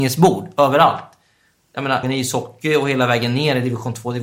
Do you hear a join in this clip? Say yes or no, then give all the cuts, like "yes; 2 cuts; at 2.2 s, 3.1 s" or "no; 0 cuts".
yes; 1 cut; at 2.0 s